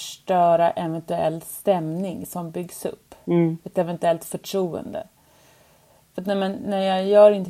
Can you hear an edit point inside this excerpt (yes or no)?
no